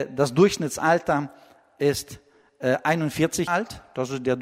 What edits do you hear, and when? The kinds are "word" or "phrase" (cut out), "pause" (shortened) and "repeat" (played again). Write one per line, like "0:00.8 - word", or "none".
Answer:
0:03.5 - word